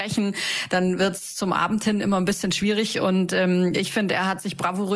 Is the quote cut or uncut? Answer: uncut